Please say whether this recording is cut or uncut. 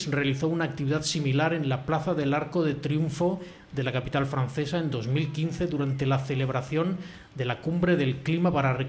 uncut